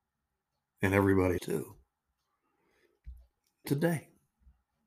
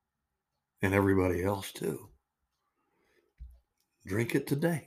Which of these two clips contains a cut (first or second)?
first